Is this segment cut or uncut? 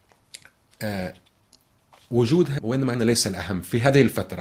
cut